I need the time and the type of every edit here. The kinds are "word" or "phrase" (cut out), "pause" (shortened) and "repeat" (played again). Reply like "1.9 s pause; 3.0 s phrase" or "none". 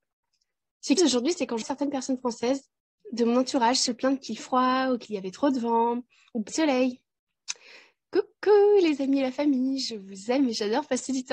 1.0 s word; 1.6 s word; 4.4 s word; 6.5 s word